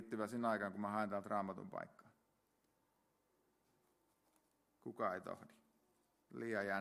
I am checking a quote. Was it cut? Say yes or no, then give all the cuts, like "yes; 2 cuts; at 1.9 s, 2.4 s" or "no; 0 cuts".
no; 0 cuts